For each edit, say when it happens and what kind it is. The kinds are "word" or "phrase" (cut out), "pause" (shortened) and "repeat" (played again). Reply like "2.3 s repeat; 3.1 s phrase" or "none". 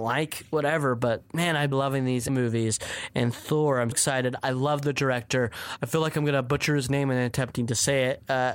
1.7 s word; 2.3 s word; 3.9 s word